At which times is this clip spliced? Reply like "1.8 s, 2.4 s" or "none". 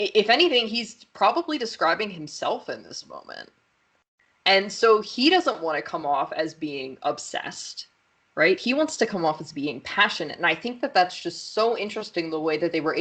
none